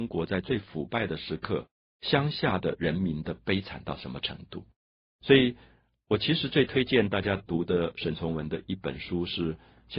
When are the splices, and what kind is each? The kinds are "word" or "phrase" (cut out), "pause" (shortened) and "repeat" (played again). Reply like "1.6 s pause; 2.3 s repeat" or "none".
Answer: none